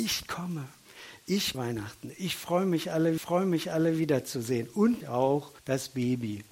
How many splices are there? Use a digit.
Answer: 4